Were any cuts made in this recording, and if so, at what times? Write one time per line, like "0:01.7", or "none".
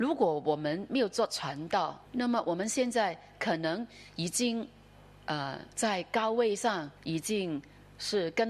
0:02.0
0:05.7
0:07.0